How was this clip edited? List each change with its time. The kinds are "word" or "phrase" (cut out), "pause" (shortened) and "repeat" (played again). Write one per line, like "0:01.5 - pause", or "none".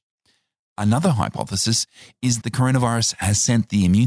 0:02.4 - word